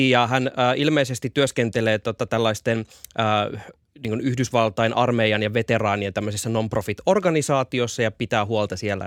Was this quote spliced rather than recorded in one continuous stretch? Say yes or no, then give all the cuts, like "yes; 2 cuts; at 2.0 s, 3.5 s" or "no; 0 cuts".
no; 0 cuts